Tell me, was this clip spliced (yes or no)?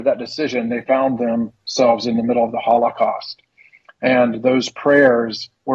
no